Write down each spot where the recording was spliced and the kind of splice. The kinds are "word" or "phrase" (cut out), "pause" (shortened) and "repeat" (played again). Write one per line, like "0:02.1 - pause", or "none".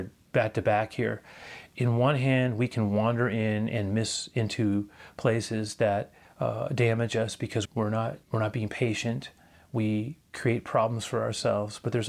0:06.2 - pause
0:07.6 - word
0:08.2 - pause
0:09.5 - phrase